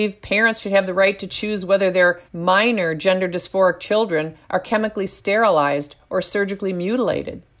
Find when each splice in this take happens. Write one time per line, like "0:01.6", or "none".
0:02.3